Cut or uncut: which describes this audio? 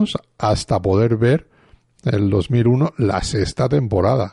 uncut